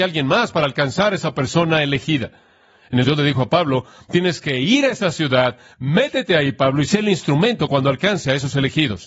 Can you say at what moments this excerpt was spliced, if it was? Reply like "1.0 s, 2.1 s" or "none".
3.0 s, 5.7 s